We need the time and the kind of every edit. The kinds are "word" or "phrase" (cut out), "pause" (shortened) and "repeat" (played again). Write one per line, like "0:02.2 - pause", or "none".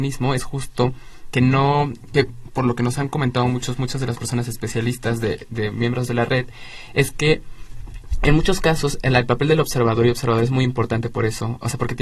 none